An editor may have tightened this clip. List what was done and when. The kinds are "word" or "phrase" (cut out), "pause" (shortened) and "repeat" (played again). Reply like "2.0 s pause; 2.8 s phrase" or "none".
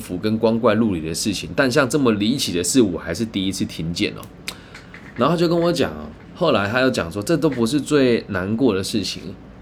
6.2 s pause